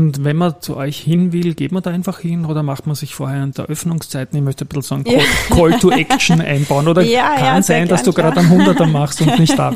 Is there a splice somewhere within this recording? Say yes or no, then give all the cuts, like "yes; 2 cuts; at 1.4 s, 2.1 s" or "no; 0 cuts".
yes; 1 cut; at 3.5 s